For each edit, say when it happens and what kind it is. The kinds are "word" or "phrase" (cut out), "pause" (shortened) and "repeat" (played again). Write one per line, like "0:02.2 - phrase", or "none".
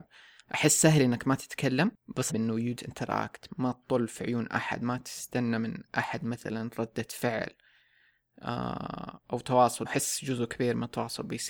0:02.3 - word
0:02.8 - word
0:09.8 - word